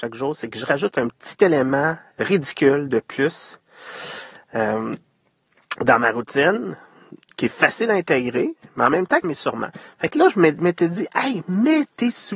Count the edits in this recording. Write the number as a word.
one